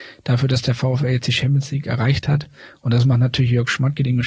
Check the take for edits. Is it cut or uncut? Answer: uncut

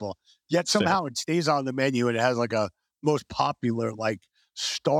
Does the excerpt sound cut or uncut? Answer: uncut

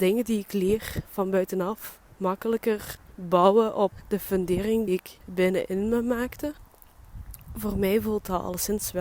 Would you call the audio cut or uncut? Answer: cut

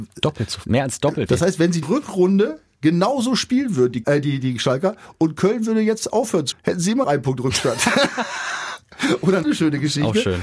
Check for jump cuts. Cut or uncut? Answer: cut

